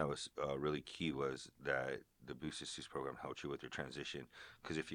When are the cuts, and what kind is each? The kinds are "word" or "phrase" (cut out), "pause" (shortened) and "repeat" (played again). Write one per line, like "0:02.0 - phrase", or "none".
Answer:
none